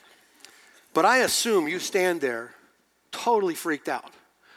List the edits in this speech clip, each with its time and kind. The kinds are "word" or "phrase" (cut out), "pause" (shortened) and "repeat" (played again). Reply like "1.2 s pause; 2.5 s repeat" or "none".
none